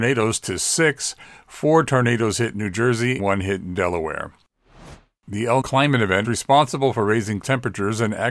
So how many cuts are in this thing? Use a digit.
4